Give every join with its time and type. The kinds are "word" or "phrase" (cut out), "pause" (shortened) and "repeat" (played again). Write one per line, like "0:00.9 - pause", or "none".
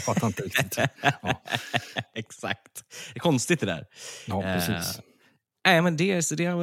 none